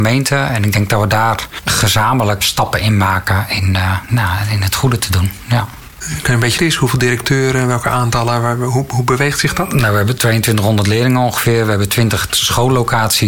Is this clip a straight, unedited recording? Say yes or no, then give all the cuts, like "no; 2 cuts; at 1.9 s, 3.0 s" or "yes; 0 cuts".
no; 2 cuts; at 2.4 s, 6.6 s